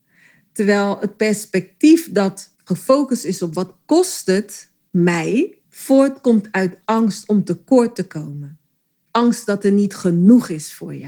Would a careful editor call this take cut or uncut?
cut